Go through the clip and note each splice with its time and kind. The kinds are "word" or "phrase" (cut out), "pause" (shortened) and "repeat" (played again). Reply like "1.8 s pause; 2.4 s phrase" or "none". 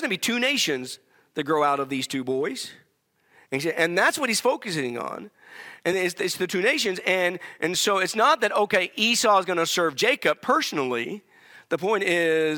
none